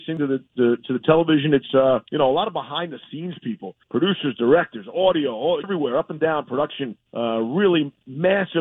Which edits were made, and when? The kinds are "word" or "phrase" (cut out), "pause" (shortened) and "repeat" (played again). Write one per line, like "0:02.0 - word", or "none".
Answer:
0:02.1 - pause
0:03.8 - pause
0:05.6 - phrase
0:07.1 - pause

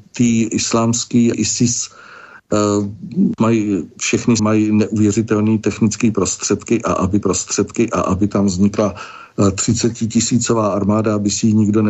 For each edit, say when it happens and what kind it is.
0:01.3 - word
0:03.4 - word
0:04.4 - word
0:07.2 - repeat

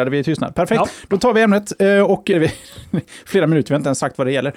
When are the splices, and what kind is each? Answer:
0:02.3 - word

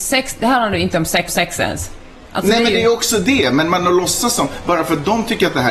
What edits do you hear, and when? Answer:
0:01.3 - repeat

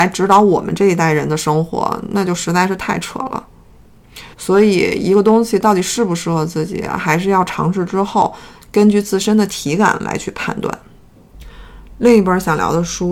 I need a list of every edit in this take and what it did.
0:04.3 - pause

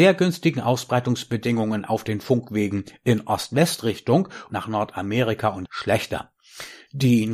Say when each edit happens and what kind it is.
0:04.5 - word
0:05.7 - phrase

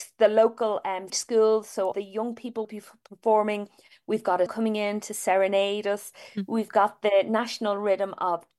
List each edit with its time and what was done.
0:01.1 - word
0:01.9 - word
0:02.6 - word
0:04.5 - word

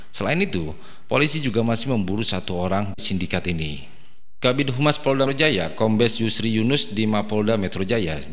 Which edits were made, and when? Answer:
0:03.0 - phrase
0:05.3 - word

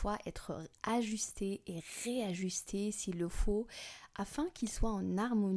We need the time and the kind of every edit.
none

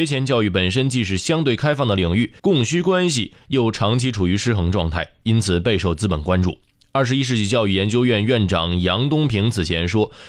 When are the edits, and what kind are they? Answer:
0:02.4 - pause

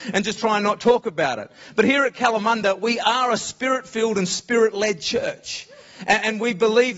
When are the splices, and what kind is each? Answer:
none

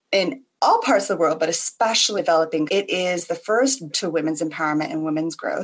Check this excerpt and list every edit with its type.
0:02.2 - word
0:02.7 - word
0:03.9 - word

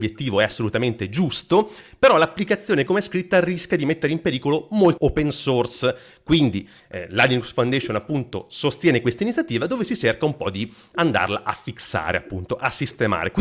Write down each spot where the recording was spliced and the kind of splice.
0:02.9 - word
0:05.0 - word

